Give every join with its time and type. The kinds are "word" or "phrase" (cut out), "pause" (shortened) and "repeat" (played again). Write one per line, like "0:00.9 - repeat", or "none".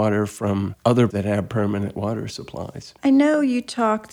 0:01.1 - word
0:03.0 - pause